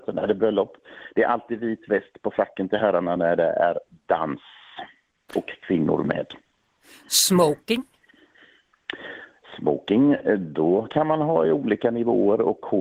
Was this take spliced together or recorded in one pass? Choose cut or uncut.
uncut